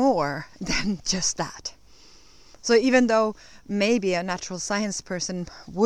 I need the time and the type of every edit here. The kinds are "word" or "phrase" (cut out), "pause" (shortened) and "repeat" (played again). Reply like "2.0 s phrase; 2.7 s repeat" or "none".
none